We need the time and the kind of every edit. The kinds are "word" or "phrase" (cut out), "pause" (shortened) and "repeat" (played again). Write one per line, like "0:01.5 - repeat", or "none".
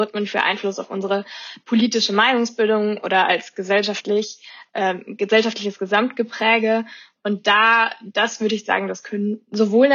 none